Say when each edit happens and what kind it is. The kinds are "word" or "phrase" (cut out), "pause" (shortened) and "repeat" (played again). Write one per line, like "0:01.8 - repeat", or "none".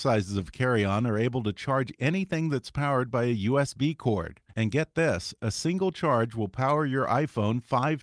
0:04.5 - pause